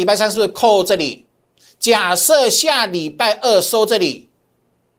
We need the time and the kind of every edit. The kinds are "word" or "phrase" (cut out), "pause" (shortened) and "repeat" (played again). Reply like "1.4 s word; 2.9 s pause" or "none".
none